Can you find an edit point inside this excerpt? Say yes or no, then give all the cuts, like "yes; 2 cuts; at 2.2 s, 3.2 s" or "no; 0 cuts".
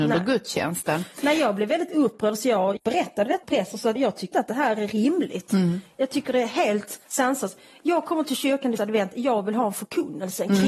yes; 6 cuts; at 2.8 s, 3.4 s, 4.0 s, 4.3 s, 7.0 s, 8.8 s